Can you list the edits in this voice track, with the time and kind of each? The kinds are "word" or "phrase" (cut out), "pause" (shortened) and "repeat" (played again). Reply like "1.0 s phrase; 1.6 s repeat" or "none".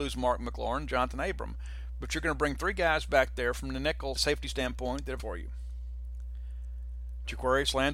4.2 s word; 5.2 s phrase